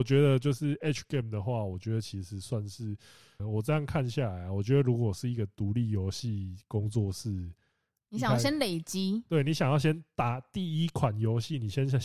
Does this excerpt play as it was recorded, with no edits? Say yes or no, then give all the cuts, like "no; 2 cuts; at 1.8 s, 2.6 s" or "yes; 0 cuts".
no; 1 cut; at 3.4 s